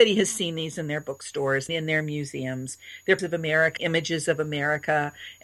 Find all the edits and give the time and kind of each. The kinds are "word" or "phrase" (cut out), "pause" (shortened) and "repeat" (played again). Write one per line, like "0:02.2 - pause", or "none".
0:01.7 - word
0:03.2 - word
0:03.8 - word